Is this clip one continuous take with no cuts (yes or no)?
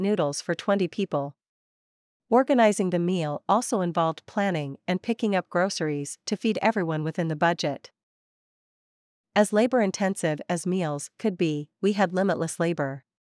yes